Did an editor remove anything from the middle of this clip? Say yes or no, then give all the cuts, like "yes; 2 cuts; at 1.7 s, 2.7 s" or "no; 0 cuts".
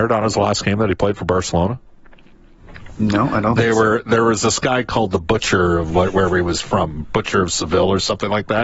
no; 0 cuts